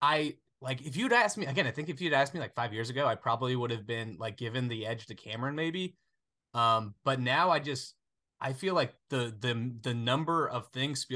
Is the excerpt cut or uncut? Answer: uncut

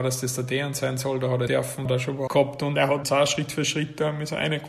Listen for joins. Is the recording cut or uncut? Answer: cut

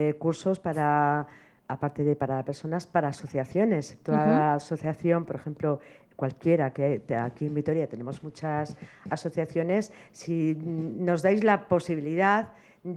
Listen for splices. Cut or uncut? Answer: uncut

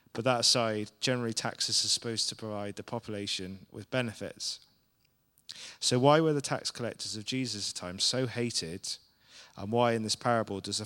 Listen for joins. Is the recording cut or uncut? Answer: uncut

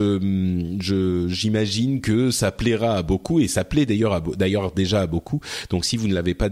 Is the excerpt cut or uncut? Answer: uncut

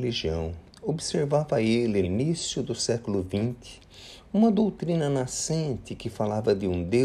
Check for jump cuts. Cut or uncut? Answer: cut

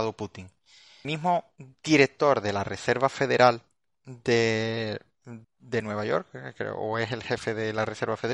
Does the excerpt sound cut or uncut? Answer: cut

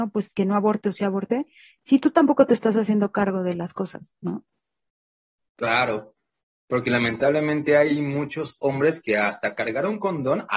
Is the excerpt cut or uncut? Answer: uncut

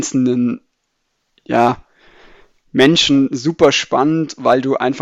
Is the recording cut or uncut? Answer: uncut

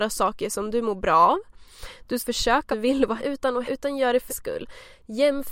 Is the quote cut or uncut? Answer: cut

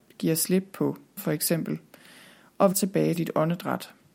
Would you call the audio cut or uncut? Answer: cut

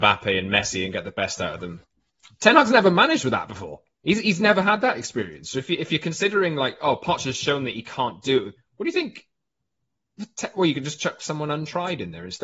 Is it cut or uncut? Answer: cut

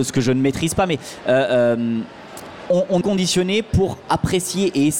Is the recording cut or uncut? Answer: cut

